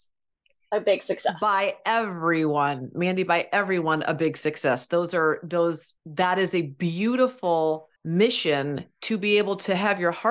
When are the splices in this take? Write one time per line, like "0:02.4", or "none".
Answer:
0:06.0
0:08.0